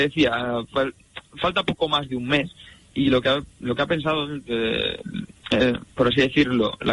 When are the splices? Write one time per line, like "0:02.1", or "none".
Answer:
none